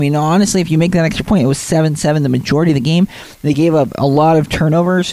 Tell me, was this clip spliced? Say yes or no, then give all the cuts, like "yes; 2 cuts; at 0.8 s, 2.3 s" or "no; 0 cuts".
no; 0 cuts